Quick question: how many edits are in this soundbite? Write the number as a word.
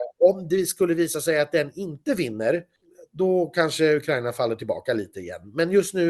zero